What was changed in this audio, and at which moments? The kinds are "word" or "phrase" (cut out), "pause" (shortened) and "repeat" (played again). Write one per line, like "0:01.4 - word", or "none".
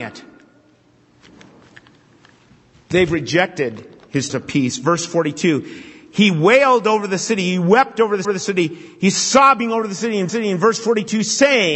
0:04.3 - word
0:08.2 - repeat
0:10.3 - repeat